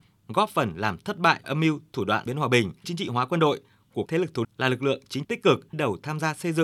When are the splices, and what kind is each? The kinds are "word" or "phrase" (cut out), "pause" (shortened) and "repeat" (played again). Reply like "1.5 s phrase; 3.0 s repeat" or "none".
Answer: 1.4 s word; 2.3 s word; 2.8 s word; 4.1 s word; 4.4 s word; 5.2 s word; 5.7 s word